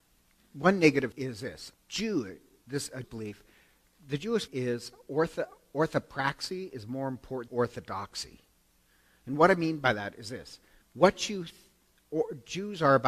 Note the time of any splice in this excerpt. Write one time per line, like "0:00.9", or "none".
0:01.1
0:01.7
0:03.0
0:04.5
0:07.5
0:10.8